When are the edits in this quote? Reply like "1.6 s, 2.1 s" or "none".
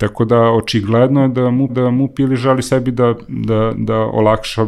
1.7 s